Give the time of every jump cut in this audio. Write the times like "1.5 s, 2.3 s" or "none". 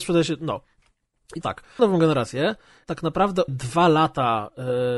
1.4 s, 1.8 s, 2.8 s, 3.5 s